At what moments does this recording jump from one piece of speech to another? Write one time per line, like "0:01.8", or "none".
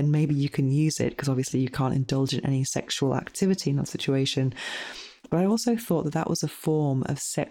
none